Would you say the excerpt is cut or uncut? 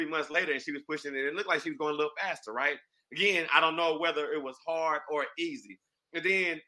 uncut